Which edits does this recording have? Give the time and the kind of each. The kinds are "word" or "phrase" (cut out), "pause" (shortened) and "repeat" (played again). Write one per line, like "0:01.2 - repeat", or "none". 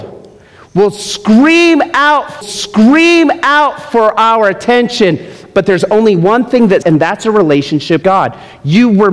0:02.4 - repeat
0:06.8 - word
0:08.0 - word

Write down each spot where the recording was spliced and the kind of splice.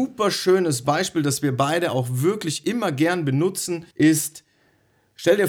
0:03.9 - pause

